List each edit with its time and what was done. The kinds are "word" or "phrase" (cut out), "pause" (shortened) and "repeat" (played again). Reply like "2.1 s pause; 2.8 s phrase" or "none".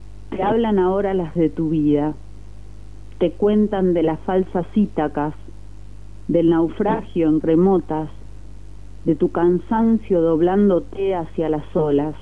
1.4 s word; 7.4 s word